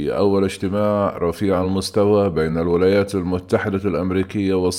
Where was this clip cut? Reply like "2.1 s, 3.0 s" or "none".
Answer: none

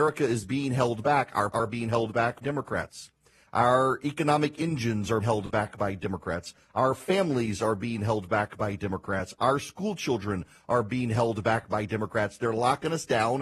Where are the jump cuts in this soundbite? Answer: 1.5 s, 2.4 s, 5.2 s

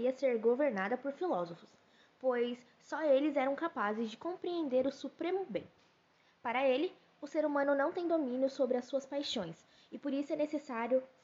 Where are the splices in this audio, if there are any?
none

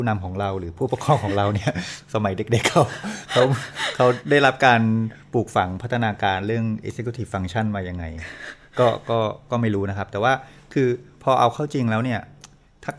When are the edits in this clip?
none

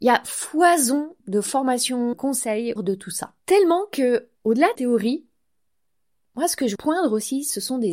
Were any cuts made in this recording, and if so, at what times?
1.2 s, 2.1 s, 2.8 s, 3.4 s, 4.4 s, 4.7 s, 6.7 s

